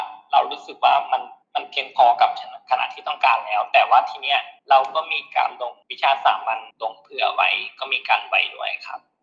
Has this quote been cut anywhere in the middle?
yes; 4 cuts; at 1.4 s, 4.6 s, 5.8 s, 6.7 s

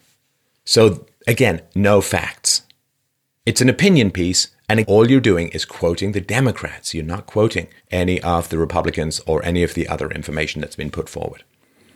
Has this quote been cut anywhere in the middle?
yes; 2 cuts; at 4.8 s, 7.8 s

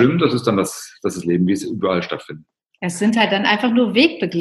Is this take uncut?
yes; 0 cuts

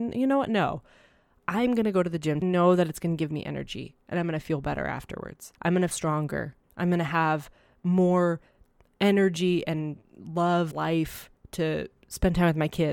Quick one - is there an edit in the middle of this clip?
yes; 6 cuts; at 2.4 s, 4.0 s, 5.6 s, 5.9 s, 6.6 s, 10.7 s

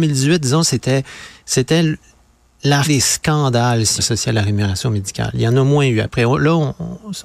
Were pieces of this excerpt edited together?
yes; 2 cuts; at 2.8 s, 4.0 s

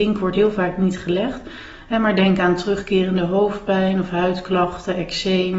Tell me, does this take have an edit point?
no; 0 cuts

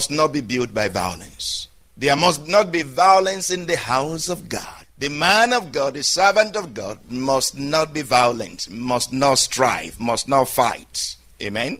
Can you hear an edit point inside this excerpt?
no; 0 cuts

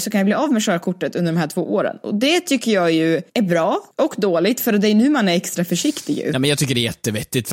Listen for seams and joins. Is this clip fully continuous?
no; 2 cuts; at 3.3 s, 3.9 s

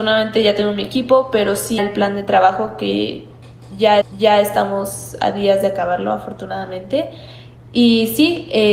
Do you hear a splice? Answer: yes; 2 cuts; at 1.8 s, 4.0 s

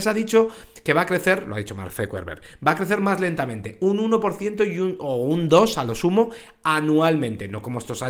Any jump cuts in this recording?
no; 0 cuts

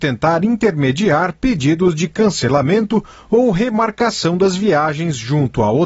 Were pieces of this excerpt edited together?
no; 0 cuts

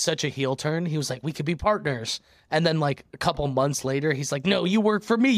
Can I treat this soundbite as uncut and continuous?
yes; 0 cuts

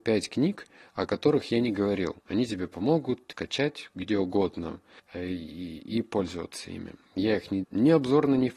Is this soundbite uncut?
no; 4 cuts; at 2.2 s, 3.3 s, 5.0 s, 7.6 s

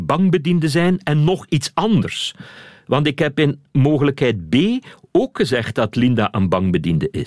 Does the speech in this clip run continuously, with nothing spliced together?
yes; 0 cuts

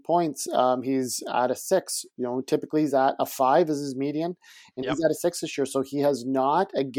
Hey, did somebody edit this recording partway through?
no; 0 cuts

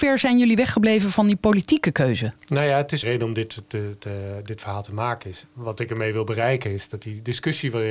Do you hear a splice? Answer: yes; 2 cuts; at 2.4 s, 3.0 s

